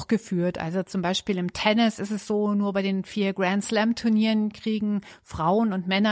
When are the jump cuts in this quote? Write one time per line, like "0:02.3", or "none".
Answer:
none

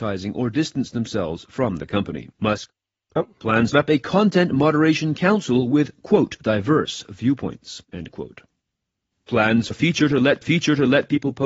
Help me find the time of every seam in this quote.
0:02.3
0:03.7
0:06.4
0:07.8
0:09.7
0:10.4

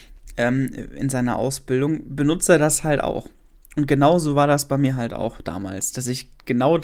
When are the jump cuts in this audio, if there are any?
none

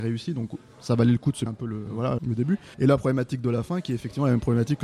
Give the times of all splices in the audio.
0:01.5
0:02.2
0:02.7

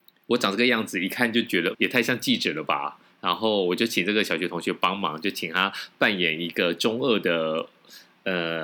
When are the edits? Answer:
0:01.7

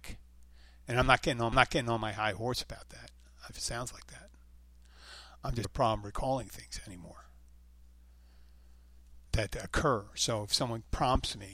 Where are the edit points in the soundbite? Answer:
0:01.5
0:03.5
0:05.6
0:09.3

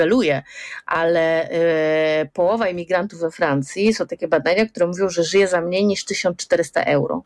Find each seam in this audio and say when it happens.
none

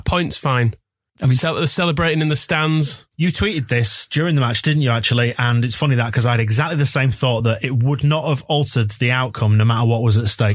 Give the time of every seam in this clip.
none

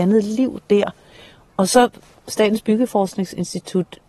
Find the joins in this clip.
none

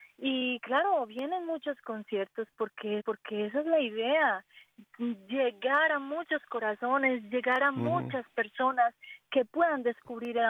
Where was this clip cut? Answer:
0:03.0

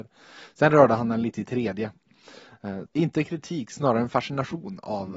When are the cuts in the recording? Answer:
0:02.9

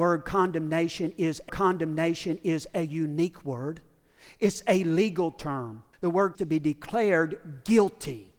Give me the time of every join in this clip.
0:01.5
0:05.9
0:06.3

